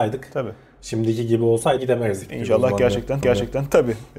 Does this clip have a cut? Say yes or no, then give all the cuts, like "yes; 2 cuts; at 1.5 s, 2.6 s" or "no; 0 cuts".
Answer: yes; 2 cuts; at 1.8 s, 3.2 s